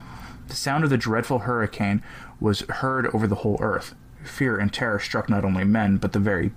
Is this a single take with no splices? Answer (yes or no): yes